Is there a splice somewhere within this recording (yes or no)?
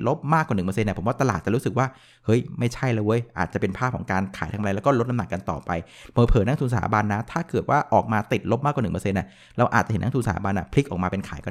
no